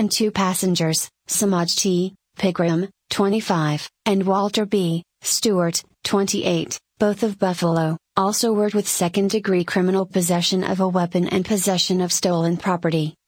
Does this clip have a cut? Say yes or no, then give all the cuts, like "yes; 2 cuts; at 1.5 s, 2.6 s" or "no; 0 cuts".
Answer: yes; 1 cut; at 8.7 s